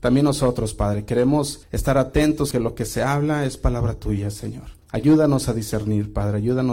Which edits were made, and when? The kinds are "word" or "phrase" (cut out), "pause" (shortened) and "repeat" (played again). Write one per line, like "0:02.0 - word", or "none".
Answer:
0:01.6 - pause
0:02.5 - word
0:04.8 - pause